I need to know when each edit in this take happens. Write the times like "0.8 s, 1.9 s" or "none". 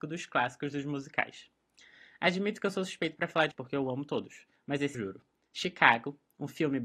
3.5 s, 4.9 s